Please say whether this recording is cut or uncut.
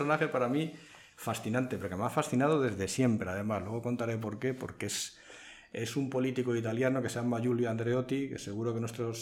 uncut